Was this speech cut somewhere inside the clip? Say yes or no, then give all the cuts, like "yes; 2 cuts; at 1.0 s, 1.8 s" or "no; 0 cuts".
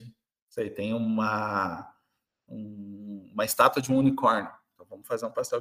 no; 0 cuts